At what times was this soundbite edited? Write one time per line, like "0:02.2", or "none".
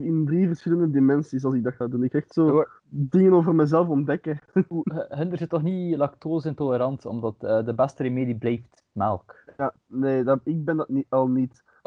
0:02.8